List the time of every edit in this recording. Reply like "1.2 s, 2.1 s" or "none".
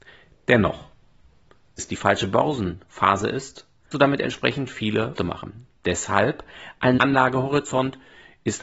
1.8 s, 3.9 s, 5.2 s, 7.0 s